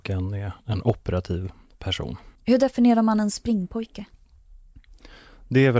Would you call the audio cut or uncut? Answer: cut